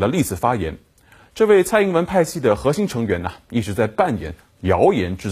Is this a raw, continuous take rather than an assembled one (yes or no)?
yes